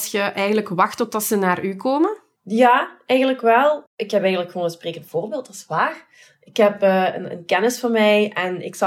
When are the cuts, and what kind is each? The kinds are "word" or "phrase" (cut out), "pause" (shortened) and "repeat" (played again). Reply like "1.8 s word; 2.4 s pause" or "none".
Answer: none